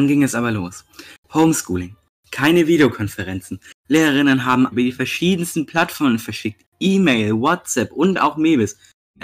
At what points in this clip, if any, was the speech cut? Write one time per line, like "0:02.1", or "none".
0:03.8
0:04.7